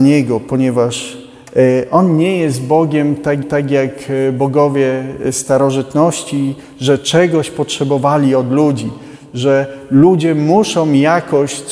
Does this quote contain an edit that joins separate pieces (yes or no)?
yes